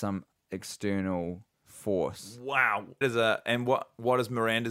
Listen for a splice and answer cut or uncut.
cut